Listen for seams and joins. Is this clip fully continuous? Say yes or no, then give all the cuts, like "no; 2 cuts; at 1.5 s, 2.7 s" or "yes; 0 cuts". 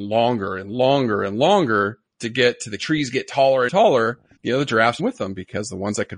no; 5 cuts; at 2.1 s, 2.8 s, 3.7 s, 4.4 s, 5.0 s